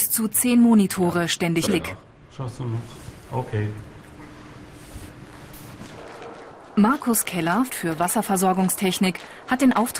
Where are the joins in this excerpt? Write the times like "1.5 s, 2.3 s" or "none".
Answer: 1.7 s, 7.7 s